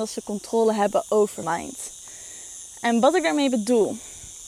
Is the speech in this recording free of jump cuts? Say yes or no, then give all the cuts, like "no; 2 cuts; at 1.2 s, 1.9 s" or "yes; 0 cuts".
no; 1 cut; at 1.4 s